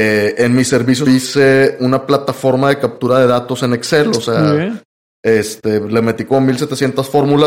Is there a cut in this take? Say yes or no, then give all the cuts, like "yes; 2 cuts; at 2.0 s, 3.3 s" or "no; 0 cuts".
yes; 1 cut; at 1.1 s